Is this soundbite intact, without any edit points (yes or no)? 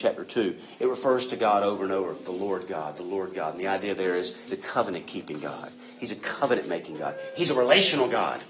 no